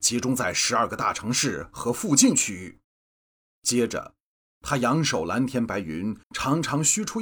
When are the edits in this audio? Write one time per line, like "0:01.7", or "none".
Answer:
0:02.8
0:06.2